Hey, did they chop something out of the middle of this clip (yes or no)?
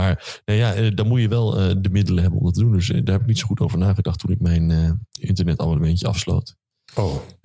yes